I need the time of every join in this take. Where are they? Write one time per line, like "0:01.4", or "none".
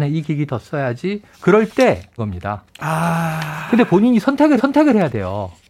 0:01.3
0:02.2
0:04.6